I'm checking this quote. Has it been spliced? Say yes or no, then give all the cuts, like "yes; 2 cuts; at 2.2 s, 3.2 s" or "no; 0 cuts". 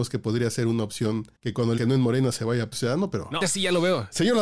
yes; 4 cuts; at 1.3 s, 1.8 s, 2.7 s, 3.4 s